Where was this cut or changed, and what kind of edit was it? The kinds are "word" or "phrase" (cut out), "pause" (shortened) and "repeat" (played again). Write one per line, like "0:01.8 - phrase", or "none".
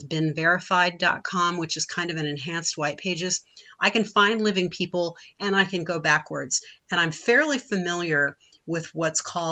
none